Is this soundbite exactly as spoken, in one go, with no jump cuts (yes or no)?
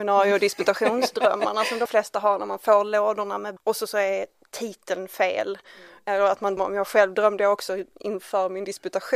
no